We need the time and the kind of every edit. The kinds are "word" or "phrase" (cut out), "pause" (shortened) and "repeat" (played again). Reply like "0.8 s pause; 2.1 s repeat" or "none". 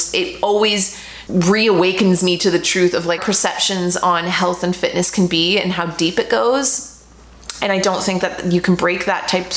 1.3 s word; 3.2 s phrase